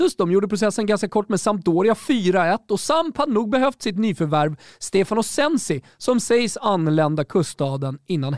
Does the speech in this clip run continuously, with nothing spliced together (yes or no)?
yes